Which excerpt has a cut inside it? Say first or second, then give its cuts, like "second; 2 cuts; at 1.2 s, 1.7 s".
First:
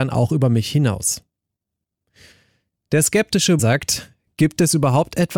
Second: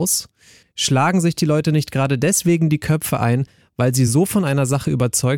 first; 1 cut; at 3.6 s